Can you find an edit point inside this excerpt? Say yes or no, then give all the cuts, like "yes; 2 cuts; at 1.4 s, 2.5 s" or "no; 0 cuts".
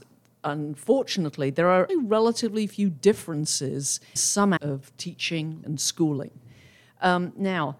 yes; 4 cuts; at 1.9 s, 4.2 s, 4.6 s, 5.6 s